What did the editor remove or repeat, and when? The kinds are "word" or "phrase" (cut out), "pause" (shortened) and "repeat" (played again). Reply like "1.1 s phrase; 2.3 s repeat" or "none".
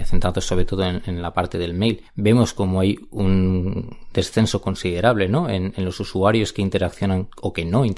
2.1 s pause

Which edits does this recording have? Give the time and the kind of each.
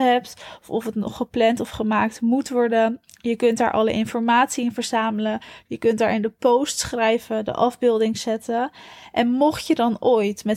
none

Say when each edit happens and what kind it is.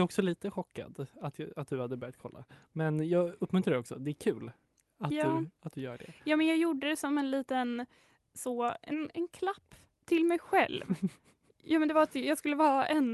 none

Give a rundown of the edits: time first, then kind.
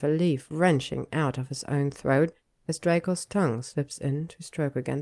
none

